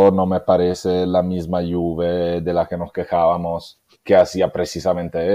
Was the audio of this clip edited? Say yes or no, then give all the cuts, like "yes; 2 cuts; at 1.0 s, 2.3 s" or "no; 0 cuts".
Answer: no; 0 cuts